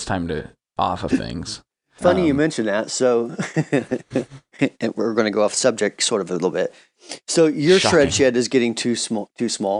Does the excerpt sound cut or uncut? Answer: cut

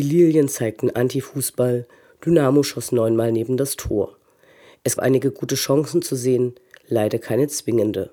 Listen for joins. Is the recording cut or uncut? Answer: cut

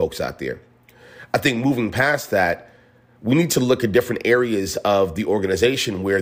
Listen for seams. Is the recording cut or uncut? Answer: uncut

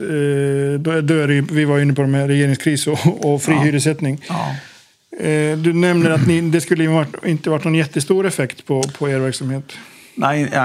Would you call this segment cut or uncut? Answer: uncut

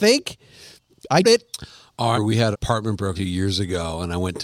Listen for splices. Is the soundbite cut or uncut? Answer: cut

